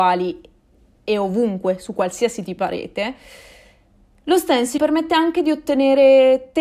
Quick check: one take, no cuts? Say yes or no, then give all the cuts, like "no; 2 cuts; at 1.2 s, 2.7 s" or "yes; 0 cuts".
no; 2 cuts; at 2.6 s, 4.8 s